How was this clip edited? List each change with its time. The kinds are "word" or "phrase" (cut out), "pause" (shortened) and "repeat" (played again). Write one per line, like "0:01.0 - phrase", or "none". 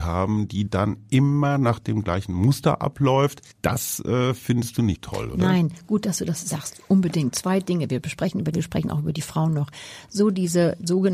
0:03.5 - pause
0:05.0 - word
0:08.5 - phrase